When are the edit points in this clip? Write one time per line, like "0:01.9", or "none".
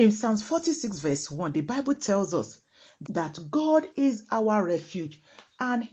none

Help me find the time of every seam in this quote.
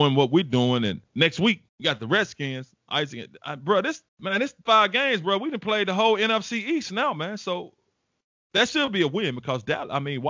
0:01.1
0:01.7
0:04.1
0:04.7

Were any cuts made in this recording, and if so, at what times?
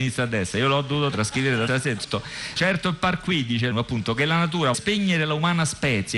0:01.1
0:01.7
0:02.0
0:02.6
0:03.7
0:04.7

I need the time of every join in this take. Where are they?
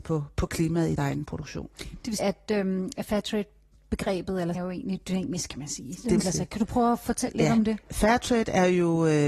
0:01.0
0:02.2
0:04.5
0:06.2

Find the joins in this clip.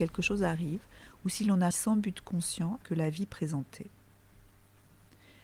0:01.7
0:02.8

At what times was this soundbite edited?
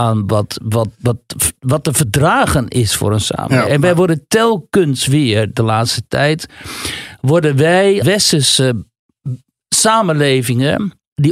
0:08.0

